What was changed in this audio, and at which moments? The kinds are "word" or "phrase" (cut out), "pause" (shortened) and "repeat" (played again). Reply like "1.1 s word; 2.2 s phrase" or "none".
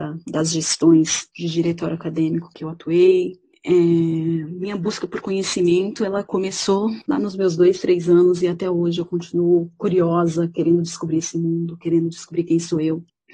none